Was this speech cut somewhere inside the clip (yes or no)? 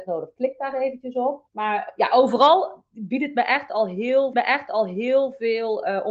yes